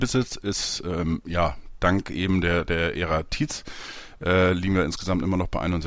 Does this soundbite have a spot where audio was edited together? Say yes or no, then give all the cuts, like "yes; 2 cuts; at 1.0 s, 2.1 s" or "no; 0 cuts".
no; 0 cuts